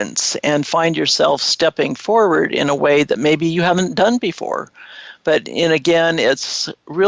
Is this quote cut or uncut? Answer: uncut